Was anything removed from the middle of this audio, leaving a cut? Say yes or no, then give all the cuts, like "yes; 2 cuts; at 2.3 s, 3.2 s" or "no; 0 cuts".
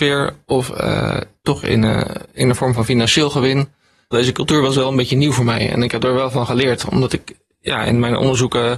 no; 0 cuts